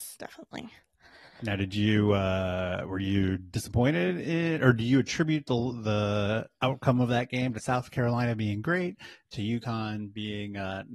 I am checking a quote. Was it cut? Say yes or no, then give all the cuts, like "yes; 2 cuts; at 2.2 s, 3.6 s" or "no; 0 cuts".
no; 0 cuts